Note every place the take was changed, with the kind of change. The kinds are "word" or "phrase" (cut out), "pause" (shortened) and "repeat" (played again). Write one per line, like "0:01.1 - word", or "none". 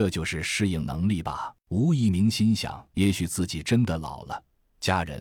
0:01.6 - pause
0:02.9 - pause